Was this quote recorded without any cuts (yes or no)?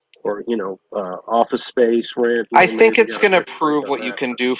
yes